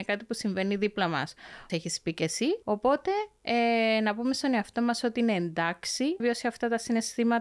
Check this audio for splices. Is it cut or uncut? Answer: cut